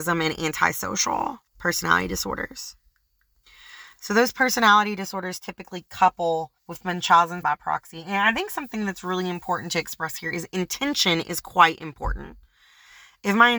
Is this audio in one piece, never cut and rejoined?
no; 3 cuts; at 1.5 s, 6.6 s, 7.4 s

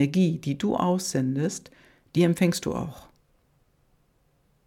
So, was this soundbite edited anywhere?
no; 0 cuts

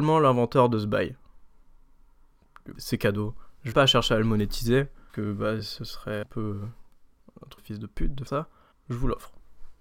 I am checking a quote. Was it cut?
yes; 7 cuts; at 2.7 s, 3.7 s, 5.1 s, 6.2 s, 7.6 s, 8.3 s, 8.7 s

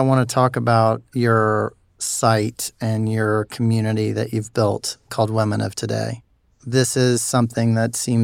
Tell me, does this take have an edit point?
no; 0 cuts

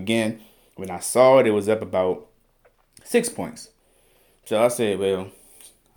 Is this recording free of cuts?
yes; 0 cuts

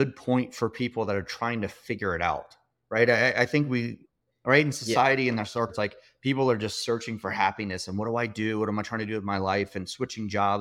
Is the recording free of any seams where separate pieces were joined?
no; 1 cut; at 5.7 s

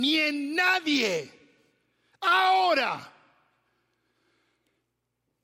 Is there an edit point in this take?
no; 0 cuts

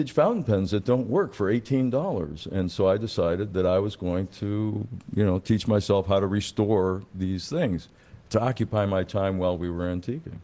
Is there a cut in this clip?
no; 0 cuts

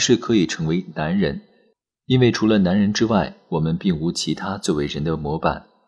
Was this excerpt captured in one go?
yes; 0 cuts

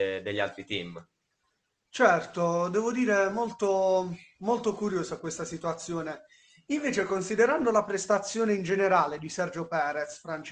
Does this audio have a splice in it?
no; 0 cuts

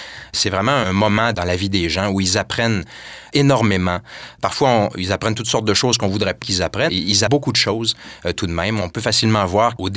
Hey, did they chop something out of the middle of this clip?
yes; 4 cuts; at 1.3 s, 6.4 s, 6.9 s, 7.3 s

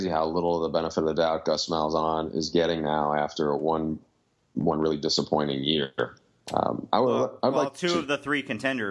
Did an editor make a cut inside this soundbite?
no; 0 cuts

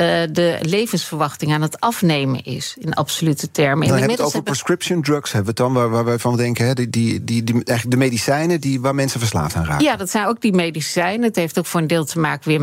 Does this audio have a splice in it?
no; 0 cuts

